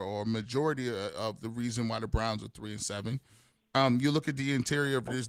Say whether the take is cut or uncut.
uncut